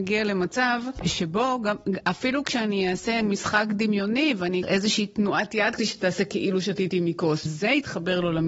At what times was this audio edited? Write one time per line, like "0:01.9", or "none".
0:03.2
0:04.6
0:05.8
0:07.5